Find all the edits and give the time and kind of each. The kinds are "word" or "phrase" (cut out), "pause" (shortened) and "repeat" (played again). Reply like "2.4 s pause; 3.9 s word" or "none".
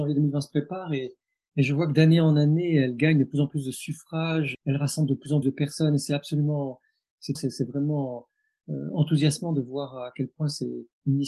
4.5 s word; 5.4 s word; 7.4 s word